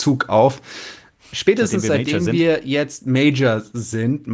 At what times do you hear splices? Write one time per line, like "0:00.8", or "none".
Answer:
0:01.2